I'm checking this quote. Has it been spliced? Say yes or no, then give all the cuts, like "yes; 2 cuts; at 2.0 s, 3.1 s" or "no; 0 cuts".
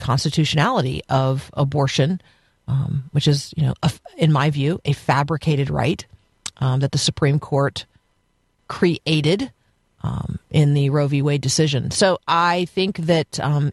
no; 0 cuts